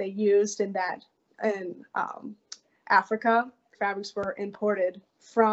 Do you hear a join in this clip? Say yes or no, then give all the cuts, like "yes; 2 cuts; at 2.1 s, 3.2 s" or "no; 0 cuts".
yes; 1 cut; at 3.7 s